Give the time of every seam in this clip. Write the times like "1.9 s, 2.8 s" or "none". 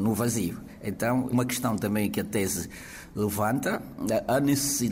1.3 s